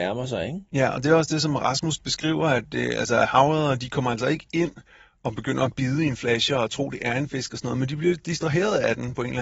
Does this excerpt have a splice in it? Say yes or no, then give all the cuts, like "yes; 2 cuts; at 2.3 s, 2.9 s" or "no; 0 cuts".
no; 0 cuts